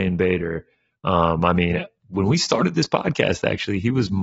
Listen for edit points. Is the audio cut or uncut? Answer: uncut